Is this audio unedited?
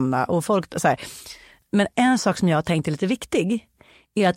yes; 0 cuts

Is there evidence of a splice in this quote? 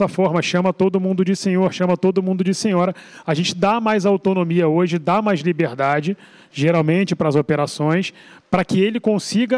no; 0 cuts

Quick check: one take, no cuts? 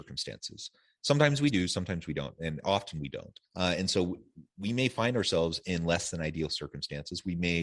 no; 1 cut; at 3.5 s

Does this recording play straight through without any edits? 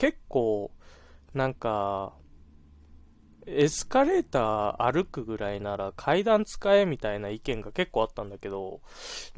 yes; 0 cuts

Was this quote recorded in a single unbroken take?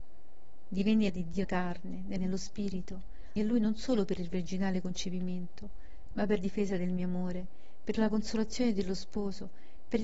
no; 5 cuts; at 1.1 s, 1.4 s, 2.2 s, 3.4 s, 6.4 s

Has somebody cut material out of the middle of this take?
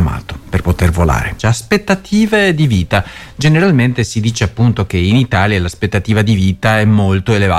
no; 0 cuts

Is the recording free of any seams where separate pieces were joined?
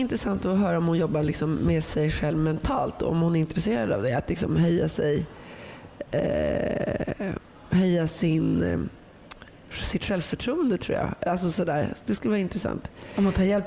yes; 0 cuts

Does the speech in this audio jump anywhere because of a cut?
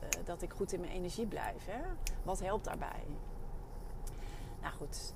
no; 0 cuts

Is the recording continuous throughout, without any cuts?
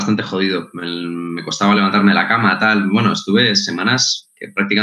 yes; 0 cuts

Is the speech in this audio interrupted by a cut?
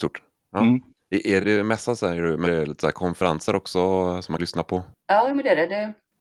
yes; 3 cuts; at 1.4 s, 2.4 s, 4.4 s

